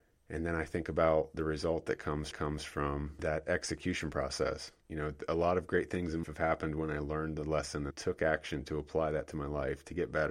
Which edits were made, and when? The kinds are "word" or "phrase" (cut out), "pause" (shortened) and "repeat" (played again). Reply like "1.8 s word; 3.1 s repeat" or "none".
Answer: 2.3 s repeat; 4.8 s pause; 6.2 s word; 7.9 s phrase